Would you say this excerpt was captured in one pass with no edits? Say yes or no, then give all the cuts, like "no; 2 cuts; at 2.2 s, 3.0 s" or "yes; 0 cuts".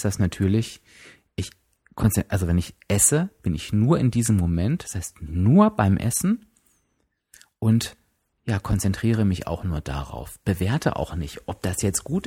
yes; 0 cuts